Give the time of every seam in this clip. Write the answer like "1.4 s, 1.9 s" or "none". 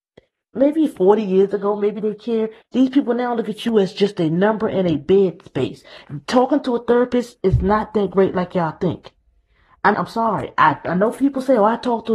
9.9 s